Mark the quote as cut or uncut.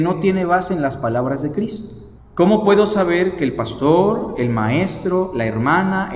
cut